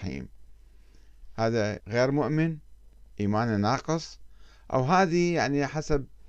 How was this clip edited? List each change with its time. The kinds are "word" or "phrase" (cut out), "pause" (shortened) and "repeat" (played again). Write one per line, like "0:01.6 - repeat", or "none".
0:01.8 - word